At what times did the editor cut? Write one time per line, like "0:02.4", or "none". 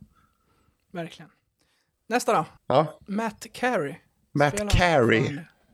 0:02.6
0:04.2